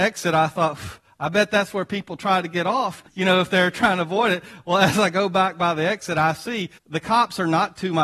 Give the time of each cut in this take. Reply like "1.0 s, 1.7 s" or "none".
3.1 s, 6.8 s